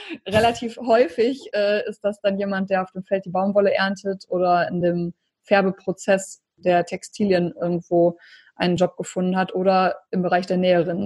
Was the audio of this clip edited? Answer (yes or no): no